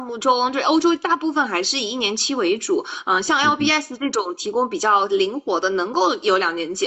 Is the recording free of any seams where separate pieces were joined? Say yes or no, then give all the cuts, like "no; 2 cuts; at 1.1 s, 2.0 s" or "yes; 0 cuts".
yes; 0 cuts